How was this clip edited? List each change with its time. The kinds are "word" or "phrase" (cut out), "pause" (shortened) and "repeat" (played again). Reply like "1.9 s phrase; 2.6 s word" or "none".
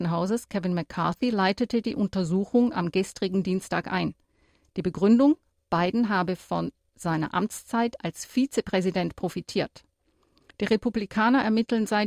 none